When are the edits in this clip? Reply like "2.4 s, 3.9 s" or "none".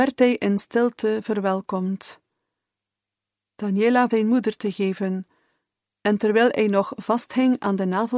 4.1 s